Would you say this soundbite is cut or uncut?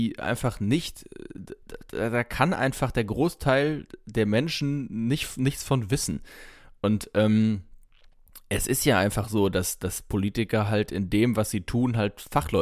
uncut